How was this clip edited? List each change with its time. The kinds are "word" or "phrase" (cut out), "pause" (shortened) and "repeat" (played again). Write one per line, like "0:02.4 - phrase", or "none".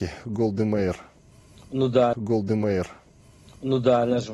0:02.1 - repeat